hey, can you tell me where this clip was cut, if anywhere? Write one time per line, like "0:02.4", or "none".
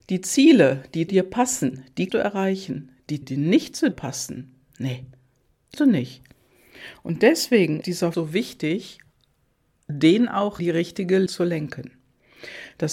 0:01.1
0:02.1
0:03.2
0:03.9
0:05.7
0:07.8
0:08.1
0:10.6
0:11.3